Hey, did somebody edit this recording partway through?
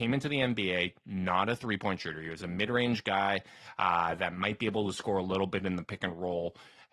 no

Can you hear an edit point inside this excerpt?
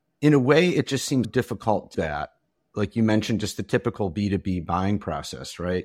yes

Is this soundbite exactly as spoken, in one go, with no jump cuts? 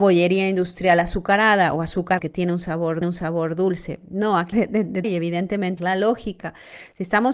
no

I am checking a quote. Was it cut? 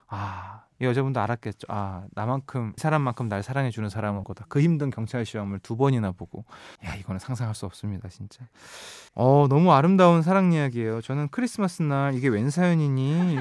yes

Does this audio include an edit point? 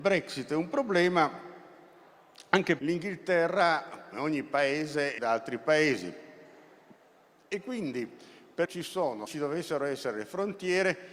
yes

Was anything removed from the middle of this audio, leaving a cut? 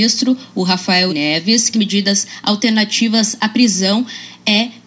yes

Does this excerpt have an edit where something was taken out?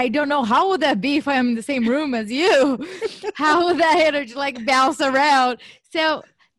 no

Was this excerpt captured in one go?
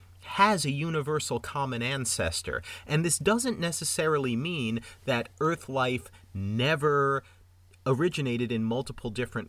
yes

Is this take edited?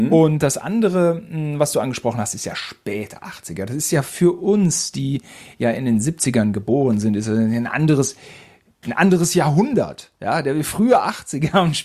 no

